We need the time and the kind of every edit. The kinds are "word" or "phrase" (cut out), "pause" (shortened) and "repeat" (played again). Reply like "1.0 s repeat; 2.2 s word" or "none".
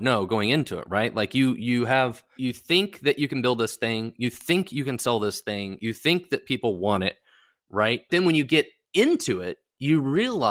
2.4 s word; 8.1 s word